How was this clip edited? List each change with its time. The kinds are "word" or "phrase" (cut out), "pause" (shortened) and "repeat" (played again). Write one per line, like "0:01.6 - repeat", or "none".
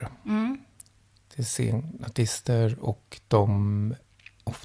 none